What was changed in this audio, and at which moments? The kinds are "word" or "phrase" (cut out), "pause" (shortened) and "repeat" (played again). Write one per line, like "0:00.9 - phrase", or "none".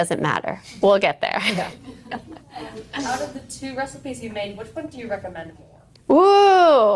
none